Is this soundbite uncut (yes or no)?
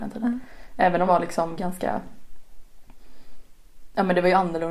no